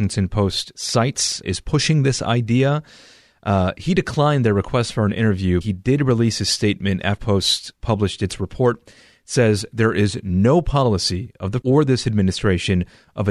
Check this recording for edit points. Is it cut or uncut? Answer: cut